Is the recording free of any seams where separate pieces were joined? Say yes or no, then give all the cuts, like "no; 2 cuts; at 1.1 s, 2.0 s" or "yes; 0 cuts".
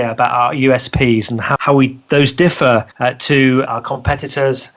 no; 3 cuts; at 1.6 s, 2.9 s, 3.7 s